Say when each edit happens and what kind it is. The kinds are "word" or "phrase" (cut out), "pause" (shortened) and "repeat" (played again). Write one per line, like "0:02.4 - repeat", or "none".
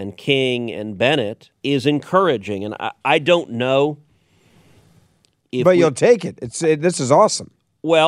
0:01.6 - pause